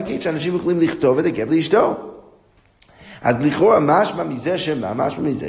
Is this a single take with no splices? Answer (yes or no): no